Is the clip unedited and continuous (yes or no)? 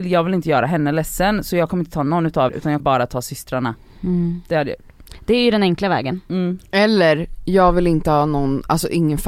no